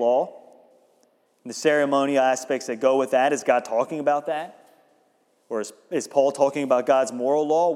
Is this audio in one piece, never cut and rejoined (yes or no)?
yes